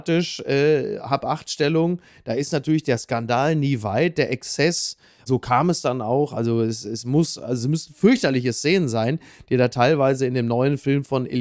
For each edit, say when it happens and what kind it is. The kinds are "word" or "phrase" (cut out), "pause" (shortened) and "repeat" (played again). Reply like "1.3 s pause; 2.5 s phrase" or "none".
none